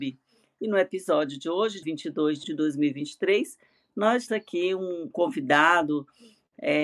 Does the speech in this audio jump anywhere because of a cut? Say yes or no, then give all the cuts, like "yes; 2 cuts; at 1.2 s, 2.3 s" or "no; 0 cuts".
yes; 4 cuts; at 1.8 s, 2.4 s, 4.3 s, 5.1 s